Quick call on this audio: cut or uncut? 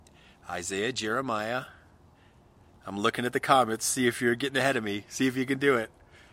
uncut